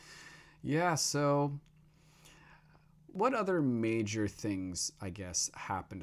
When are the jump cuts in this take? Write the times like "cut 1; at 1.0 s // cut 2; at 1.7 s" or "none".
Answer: none